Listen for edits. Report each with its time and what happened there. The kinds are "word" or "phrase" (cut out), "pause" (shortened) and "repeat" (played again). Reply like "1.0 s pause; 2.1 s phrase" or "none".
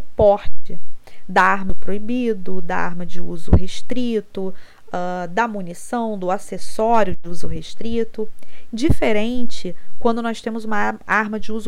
1.7 s phrase

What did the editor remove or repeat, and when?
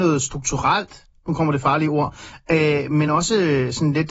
none

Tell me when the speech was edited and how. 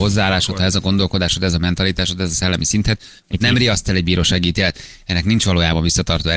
3.2 s pause

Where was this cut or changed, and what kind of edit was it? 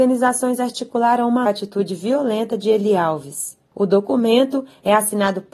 1.5 s phrase

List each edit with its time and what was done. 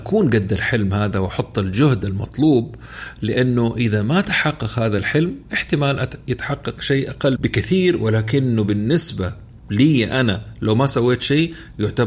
7.4 s word; 9.6 s pause

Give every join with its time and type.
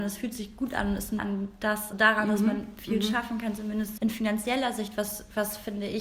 1.2 s word; 1.9 s word; 4.0 s word

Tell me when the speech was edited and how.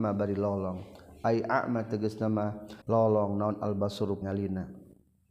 2.8 s pause; 4.2 s word

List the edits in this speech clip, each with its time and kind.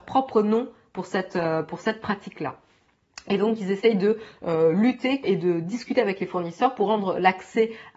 5.2 s word

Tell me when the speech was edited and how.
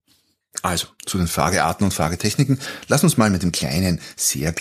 none

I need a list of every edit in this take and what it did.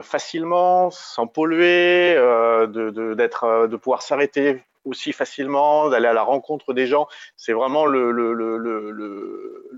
none

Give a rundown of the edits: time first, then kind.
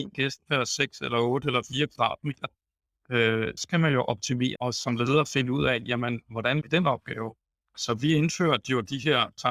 3.6 s word; 4.6 s word; 6.6 s word

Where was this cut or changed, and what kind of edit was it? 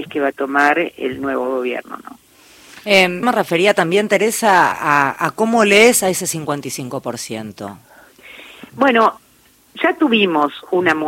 3.2 s word; 4.7 s word

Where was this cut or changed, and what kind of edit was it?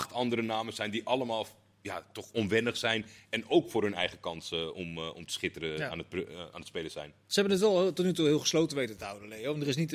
none

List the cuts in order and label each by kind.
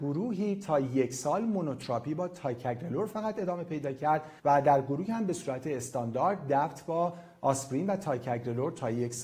4.4 s pause

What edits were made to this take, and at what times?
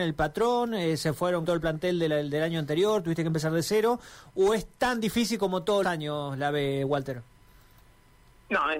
1.4 s word; 5.8 s word

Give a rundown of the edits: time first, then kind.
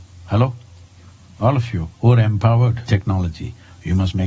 1.9 s pause; 2.9 s word

